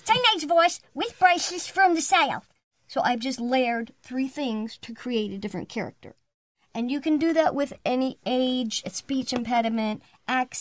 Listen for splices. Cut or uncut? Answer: uncut